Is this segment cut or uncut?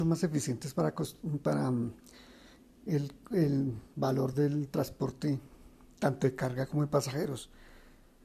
uncut